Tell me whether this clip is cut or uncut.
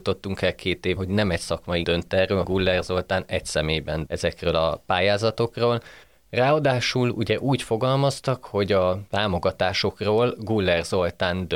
cut